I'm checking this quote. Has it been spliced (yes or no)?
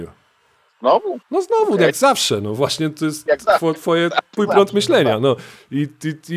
yes